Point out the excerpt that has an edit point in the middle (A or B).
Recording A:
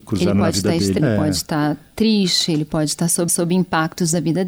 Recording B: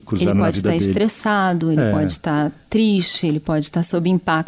A